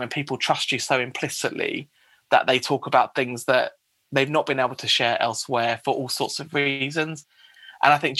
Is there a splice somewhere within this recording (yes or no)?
no